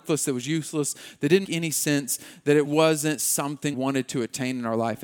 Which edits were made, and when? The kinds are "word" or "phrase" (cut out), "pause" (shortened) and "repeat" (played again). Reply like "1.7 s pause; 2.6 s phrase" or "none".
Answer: 1.4 s word; 2.6 s word; 3.7 s word